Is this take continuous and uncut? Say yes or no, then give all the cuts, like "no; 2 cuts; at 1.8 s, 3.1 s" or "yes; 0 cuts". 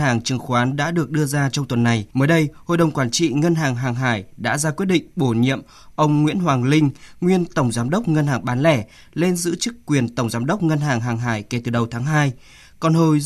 no; 1 cut; at 2.1 s